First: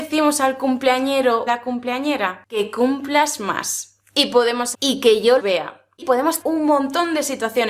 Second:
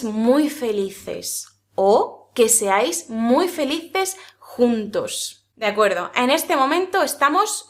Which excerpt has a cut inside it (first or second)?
first